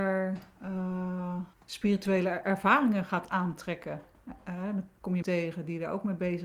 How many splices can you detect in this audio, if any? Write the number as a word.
two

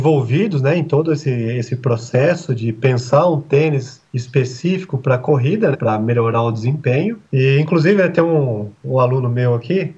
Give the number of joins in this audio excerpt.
three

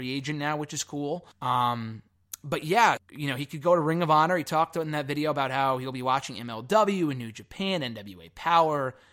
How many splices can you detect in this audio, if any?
two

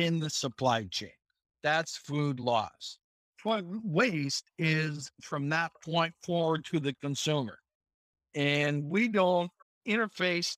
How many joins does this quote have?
zero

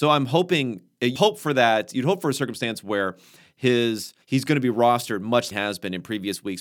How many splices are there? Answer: three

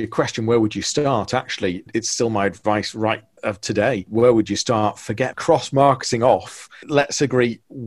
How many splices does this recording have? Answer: one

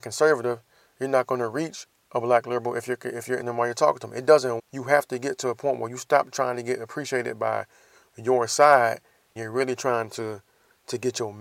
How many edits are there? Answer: three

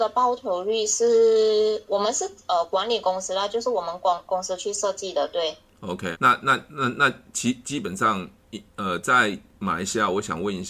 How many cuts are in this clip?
one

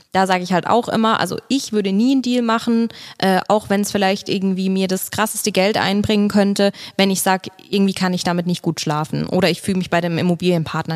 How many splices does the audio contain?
zero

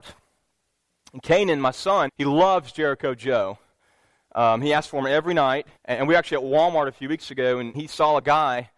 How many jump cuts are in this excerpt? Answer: three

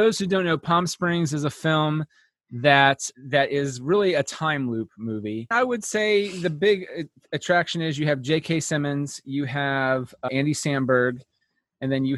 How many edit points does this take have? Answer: zero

